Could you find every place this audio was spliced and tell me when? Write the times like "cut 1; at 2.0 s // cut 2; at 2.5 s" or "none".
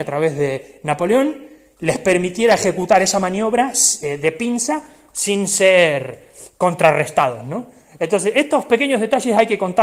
none

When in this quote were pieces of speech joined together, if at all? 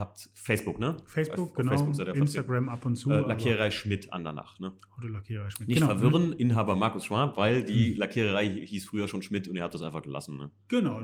none

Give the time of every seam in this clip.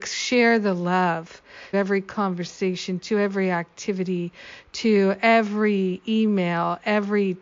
cut 1; at 1.7 s

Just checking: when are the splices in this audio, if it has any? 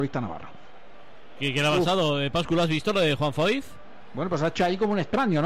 none

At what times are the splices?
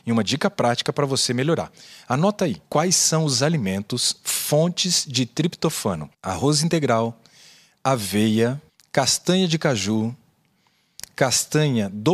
cut 1; at 2.6 s // cut 2; at 6.1 s // cut 3; at 8.7 s

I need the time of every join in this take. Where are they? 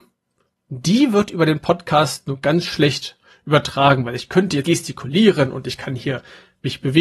cut 1; at 4.6 s

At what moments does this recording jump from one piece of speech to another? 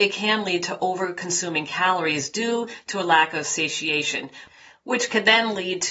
none

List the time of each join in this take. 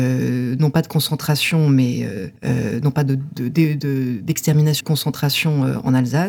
cut 1; at 2.4 s // cut 2; at 4.8 s

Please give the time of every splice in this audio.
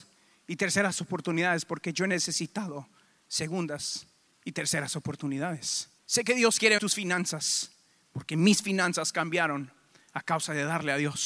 cut 1; at 6.0 s // cut 2; at 6.8 s

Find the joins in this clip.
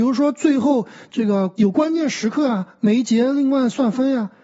cut 1; at 1.5 s

